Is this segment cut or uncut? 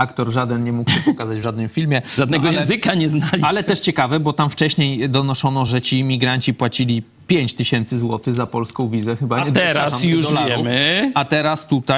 uncut